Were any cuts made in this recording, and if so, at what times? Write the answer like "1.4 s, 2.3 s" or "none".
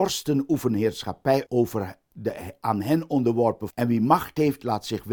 1.5 s, 3.7 s